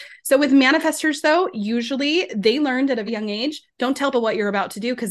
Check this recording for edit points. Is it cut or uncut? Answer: cut